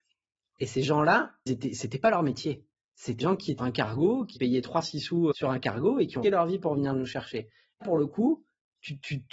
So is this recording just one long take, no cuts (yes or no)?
no